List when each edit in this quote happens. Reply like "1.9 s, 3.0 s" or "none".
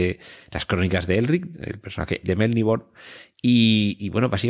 2.2 s